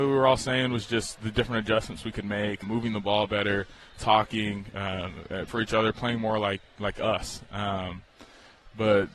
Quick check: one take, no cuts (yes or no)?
no